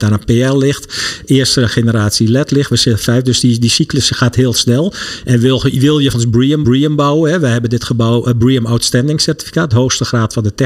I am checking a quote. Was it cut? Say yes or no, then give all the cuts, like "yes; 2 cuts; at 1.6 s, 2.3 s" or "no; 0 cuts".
yes; 2 cuts; at 6.1 s, 6.6 s